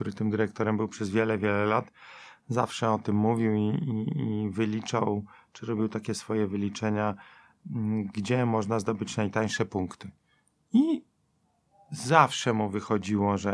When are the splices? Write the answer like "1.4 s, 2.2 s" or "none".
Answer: none